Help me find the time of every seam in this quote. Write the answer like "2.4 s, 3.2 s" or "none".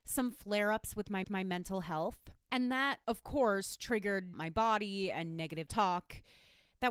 1.2 s, 2.4 s, 3.0 s, 4.3 s, 5.7 s